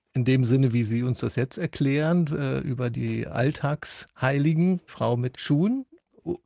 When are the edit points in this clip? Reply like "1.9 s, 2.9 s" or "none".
4.9 s, 5.3 s